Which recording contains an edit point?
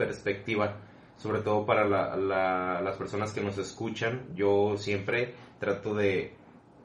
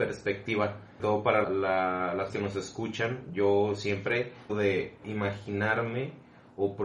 second; 5 cuts; at 1.0 s, 1.4 s, 2.3 s, 4.5 s, 5.0 s

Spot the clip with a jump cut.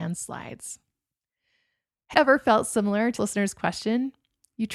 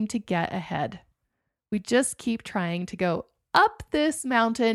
first; 2 cuts; at 2.1 s, 3.2 s

